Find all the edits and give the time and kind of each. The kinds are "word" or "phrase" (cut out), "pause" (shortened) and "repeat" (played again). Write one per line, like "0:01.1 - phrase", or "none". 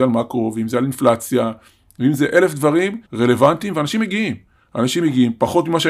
0:03.0 - pause